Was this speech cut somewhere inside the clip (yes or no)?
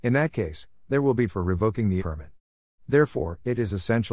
yes